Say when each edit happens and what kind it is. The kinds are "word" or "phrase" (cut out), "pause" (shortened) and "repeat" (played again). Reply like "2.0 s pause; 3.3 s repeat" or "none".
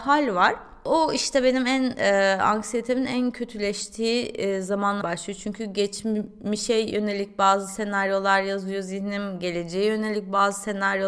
5.0 s word